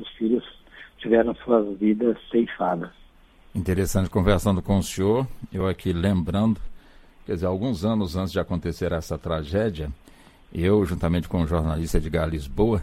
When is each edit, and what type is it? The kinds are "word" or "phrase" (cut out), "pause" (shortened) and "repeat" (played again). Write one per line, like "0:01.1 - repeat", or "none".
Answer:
none